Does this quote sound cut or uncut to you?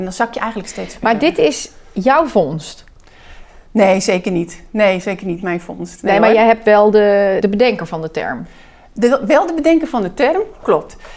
cut